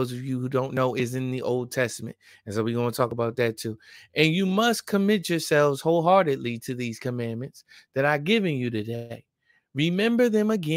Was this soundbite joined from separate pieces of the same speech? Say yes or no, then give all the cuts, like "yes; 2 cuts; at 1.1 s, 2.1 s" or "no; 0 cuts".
no; 0 cuts